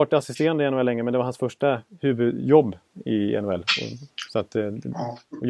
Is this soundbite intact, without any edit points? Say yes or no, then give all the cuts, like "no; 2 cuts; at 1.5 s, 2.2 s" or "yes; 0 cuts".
yes; 0 cuts